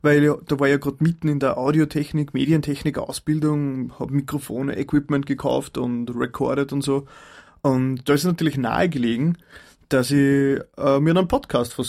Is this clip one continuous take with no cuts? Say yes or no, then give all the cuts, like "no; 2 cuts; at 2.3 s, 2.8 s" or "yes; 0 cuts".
yes; 0 cuts